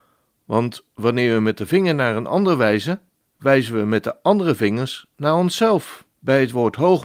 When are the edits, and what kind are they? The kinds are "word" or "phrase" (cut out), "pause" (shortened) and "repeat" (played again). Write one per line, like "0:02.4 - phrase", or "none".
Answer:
0:03.2 - pause
0:06.1 - pause